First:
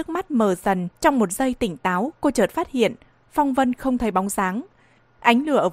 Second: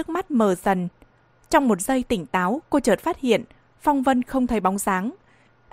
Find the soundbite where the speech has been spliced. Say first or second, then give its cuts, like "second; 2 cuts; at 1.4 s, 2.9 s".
first; 1 cut; at 1.0 s